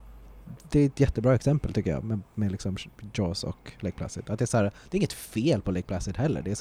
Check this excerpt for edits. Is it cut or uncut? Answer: uncut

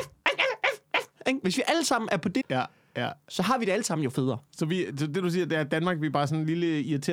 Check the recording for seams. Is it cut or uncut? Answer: cut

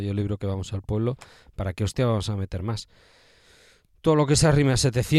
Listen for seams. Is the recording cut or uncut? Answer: uncut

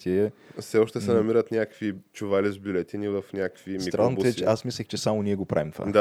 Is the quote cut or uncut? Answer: uncut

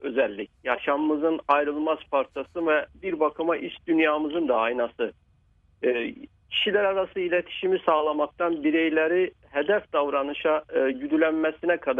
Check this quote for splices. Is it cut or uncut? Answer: uncut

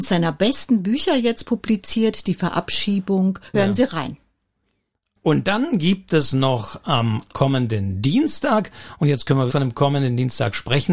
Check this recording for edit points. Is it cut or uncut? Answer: cut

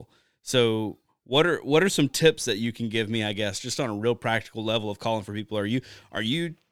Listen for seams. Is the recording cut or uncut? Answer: uncut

